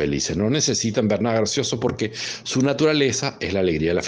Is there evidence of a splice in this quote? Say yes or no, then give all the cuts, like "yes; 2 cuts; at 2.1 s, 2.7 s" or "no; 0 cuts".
no; 0 cuts